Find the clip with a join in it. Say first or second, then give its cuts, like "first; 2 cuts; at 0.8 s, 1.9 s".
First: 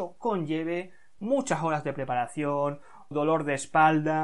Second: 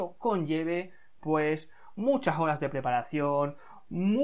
first; 2 cuts; at 1.2 s, 3.1 s